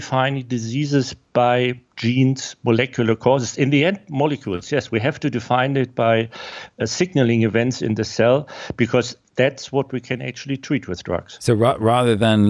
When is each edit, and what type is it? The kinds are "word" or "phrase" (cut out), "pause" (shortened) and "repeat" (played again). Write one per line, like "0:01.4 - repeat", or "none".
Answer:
none